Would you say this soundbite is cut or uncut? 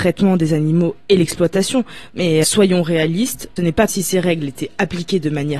cut